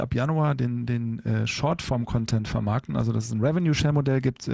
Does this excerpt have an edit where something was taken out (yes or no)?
no